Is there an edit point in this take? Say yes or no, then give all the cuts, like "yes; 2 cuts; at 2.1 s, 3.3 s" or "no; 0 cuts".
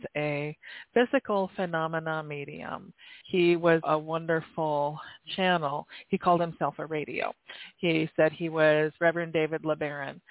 yes; 2 cuts; at 3.2 s, 3.8 s